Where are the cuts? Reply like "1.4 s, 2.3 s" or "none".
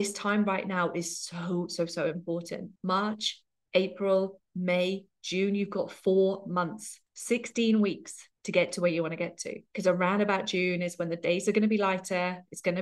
2.8 s, 7.1 s, 8.4 s, 9.7 s